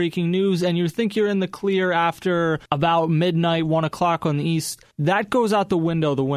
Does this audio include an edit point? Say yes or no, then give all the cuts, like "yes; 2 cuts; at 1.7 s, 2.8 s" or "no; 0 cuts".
yes; 2 cuts; at 2.7 s, 4.9 s